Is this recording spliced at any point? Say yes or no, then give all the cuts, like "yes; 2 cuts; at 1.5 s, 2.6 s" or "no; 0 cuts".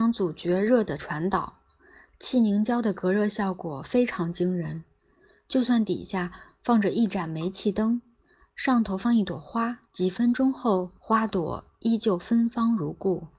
yes; 2 cuts; at 9.9 s, 11.0 s